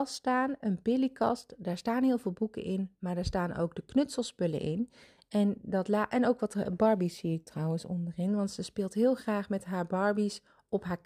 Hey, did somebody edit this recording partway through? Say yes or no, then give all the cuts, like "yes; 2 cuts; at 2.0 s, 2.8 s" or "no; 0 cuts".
no; 0 cuts